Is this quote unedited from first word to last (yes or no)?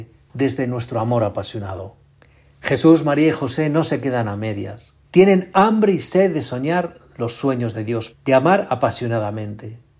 no